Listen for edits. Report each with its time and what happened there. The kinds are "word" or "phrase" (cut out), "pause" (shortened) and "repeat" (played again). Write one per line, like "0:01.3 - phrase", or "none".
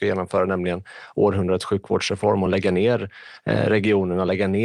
none

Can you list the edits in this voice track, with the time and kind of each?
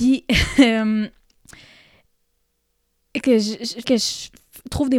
0:03.2 - word
0:03.8 - word

